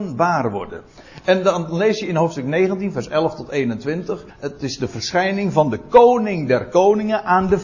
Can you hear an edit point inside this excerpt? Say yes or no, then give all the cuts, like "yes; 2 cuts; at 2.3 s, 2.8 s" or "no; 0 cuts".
yes; 1 cut; at 4.3 s